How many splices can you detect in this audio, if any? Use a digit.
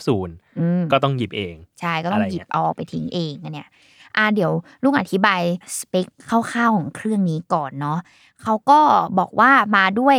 0